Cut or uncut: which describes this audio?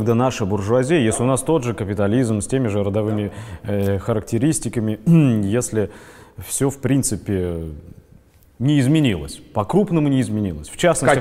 uncut